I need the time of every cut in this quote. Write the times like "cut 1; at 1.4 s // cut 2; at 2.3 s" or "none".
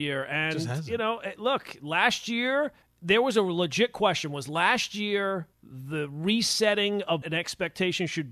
cut 1; at 2.8 s // cut 2; at 5.5 s // cut 3; at 7.2 s